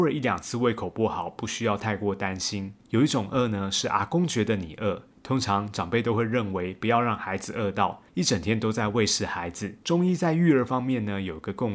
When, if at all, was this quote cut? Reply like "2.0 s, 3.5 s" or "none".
2.8 s, 5.1 s, 8.1 s, 9.8 s